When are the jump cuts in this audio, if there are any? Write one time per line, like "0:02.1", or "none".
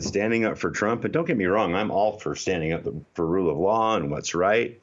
none